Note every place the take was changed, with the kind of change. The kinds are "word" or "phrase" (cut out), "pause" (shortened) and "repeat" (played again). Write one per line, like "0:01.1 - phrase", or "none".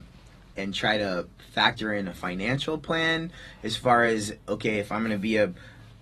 none